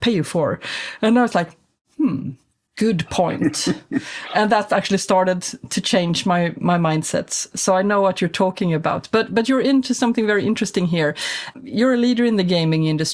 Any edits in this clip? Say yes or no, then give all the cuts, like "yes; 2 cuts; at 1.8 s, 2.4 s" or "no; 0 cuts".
no; 0 cuts